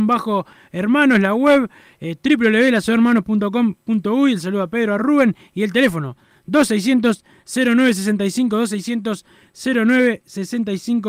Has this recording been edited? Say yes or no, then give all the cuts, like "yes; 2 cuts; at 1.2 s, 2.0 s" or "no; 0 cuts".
no; 0 cuts